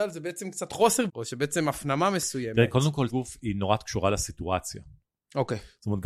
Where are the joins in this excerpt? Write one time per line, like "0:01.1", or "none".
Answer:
0:01.1
0:03.1